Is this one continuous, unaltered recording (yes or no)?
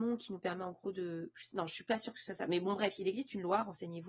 yes